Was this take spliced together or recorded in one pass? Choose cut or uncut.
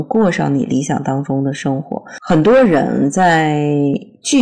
uncut